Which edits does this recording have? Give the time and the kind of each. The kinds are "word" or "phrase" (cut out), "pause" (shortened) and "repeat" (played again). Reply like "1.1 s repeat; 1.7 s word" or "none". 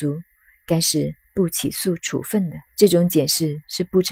2.7 s pause